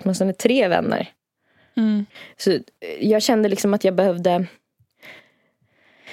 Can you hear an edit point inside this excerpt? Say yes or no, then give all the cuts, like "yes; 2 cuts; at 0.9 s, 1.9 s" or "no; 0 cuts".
no; 0 cuts